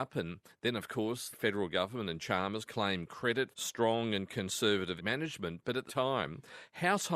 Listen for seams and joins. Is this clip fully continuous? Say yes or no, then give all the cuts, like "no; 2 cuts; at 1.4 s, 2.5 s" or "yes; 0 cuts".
no; 6 cuts; at 1.3 s, 2.2 s, 2.7 s, 3.5 s, 5.0 s, 5.9 s